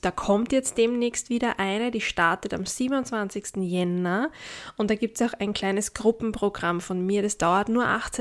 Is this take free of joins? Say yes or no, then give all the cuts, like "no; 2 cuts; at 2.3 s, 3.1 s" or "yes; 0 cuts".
yes; 0 cuts